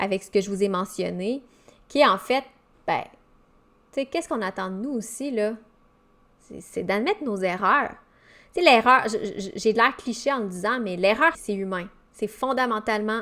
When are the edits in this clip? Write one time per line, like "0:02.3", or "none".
0:11.3